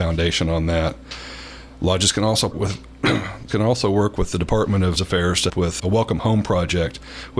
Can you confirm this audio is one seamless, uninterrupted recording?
no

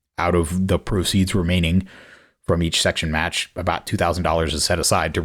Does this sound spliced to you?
no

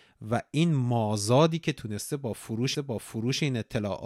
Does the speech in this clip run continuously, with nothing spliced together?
no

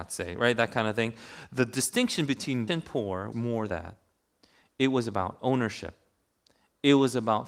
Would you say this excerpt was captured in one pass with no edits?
no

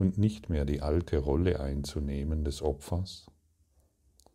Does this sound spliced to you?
no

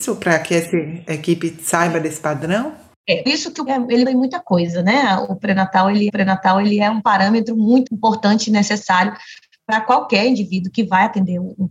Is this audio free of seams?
no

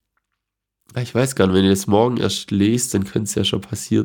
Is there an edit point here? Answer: no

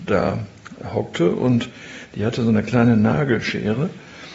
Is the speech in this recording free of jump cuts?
yes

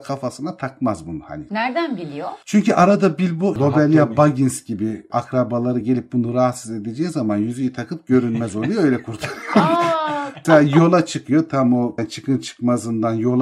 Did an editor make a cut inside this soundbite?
no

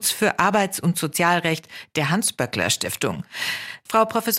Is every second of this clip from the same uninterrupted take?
yes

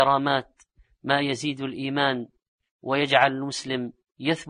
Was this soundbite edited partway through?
no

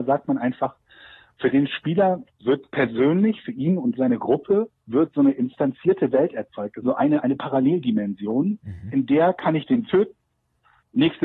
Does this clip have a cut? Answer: yes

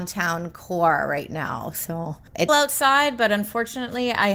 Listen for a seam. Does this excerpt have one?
yes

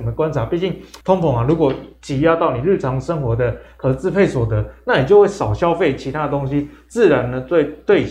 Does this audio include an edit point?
yes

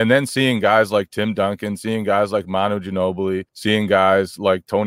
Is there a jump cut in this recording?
yes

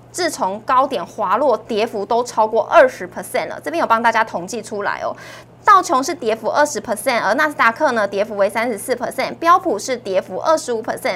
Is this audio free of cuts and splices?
yes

